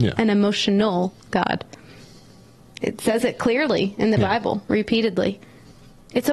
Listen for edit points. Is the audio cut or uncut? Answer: uncut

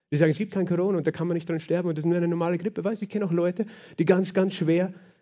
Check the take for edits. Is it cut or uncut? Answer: uncut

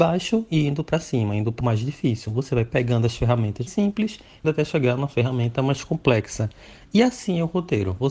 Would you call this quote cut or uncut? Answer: cut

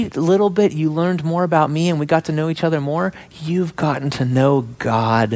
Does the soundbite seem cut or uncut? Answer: uncut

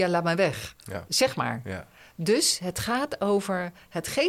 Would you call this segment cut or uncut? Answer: uncut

